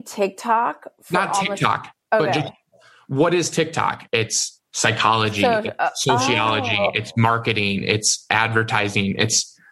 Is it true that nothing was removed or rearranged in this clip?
yes; 0 cuts

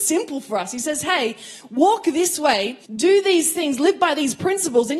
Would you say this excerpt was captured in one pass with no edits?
no; 1 cut; at 2.8 s

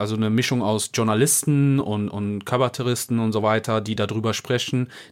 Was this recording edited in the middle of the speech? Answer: no; 0 cuts

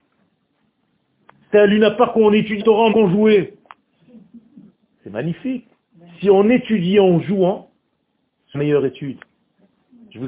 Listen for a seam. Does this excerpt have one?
yes; 3 cuts; at 2.6 s, 2.9 s, 8.5 s

